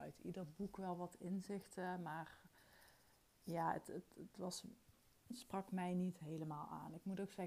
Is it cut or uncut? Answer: uncut